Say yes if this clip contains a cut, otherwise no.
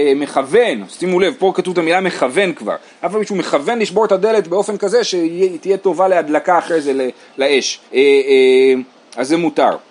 yes